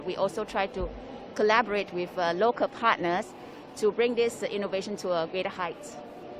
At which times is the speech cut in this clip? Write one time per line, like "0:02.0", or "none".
none

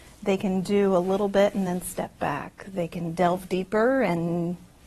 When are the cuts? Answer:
none

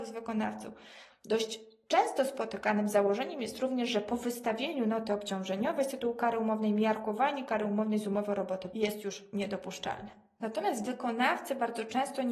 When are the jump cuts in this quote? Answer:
0:08.7

